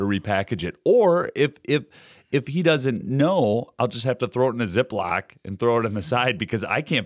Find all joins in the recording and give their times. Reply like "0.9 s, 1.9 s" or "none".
none

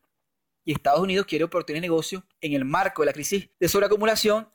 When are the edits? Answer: 2.3 s, 3.5 s

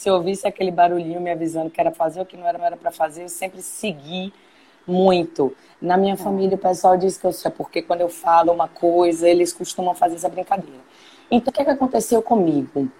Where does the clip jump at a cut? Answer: 1.9 s, 2.6 s, 7.4 s, 11.5 s

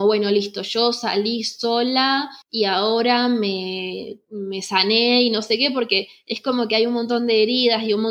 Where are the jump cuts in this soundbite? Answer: 2.4 s

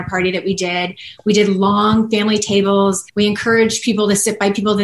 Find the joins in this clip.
3.1 s

